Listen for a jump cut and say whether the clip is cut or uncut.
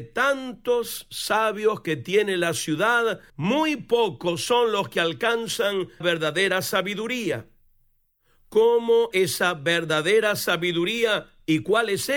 cut